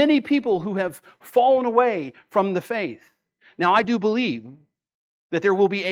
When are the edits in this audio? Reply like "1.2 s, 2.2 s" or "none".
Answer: none